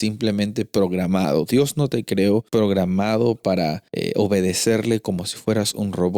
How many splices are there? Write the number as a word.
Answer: two